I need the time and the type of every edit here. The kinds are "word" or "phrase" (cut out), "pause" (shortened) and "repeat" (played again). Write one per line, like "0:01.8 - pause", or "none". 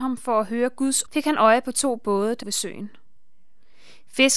0:01.1 - word
0:02.4 - word